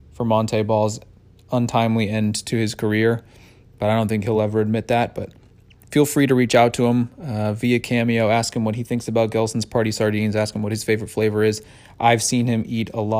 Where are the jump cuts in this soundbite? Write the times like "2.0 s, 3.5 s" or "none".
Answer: none